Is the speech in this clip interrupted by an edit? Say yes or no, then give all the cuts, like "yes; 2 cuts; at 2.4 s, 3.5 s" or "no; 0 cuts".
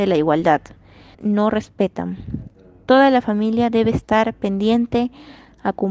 yes; 1 cut; at 1.1 s